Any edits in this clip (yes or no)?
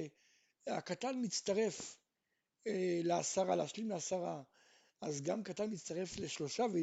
no